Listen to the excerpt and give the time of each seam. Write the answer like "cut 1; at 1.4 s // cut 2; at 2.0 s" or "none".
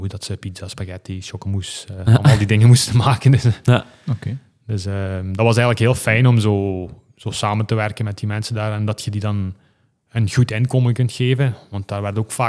none